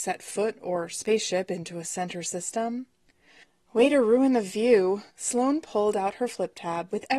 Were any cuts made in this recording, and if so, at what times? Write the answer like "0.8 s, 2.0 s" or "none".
5.1 s